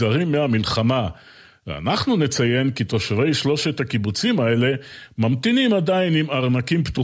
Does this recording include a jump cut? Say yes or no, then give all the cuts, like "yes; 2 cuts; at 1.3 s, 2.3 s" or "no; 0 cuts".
no; 0 cuts